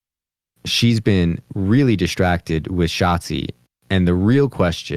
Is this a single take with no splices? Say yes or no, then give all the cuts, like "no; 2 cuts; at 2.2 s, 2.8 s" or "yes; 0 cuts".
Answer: yes; 0 cuts